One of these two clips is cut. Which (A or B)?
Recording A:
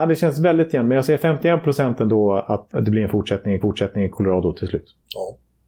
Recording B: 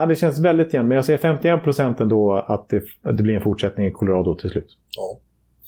A